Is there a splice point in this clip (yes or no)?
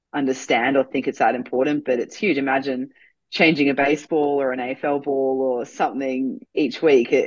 no